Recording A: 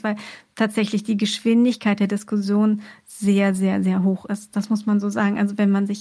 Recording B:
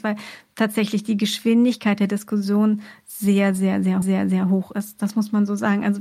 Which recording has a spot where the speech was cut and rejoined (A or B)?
B